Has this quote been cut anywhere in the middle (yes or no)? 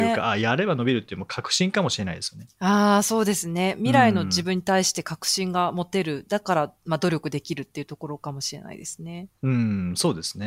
yes